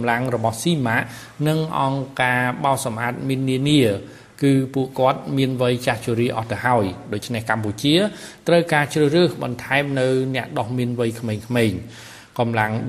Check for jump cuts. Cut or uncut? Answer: uncut